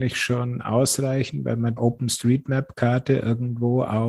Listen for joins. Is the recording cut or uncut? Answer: cut